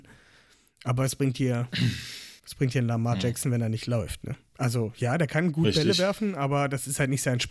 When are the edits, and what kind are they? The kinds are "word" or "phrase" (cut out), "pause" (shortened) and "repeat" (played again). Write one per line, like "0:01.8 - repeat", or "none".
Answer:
0:02.4 - pause